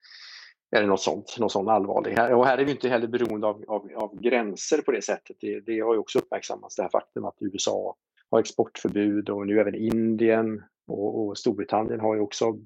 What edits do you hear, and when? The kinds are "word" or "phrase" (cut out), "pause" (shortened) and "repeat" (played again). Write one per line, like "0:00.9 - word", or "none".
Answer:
0:08.2 - pause